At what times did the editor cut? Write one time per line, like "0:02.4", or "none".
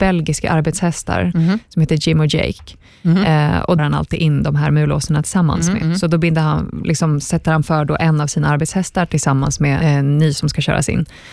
0:03.8
0:09.8